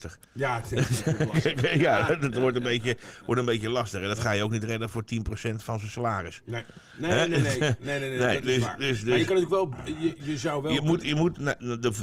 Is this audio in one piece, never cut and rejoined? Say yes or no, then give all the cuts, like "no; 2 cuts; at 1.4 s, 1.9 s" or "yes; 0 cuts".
yes; 0 cuts